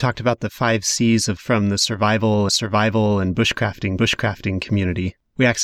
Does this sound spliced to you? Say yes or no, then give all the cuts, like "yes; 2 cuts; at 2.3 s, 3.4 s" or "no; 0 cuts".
yes; 3 cuts; at 1.4 s, 2.5 s, 4.0 s